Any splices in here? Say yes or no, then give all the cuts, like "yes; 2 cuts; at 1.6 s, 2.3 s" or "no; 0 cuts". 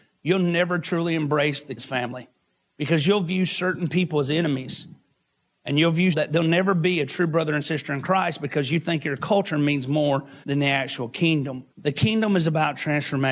yes; 4 cuts; at 1.8 s, 6.1 s, 10.4 s, 11.7 s